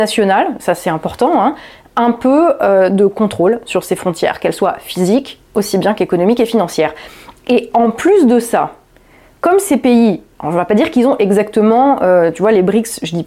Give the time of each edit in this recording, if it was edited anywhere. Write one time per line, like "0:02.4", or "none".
none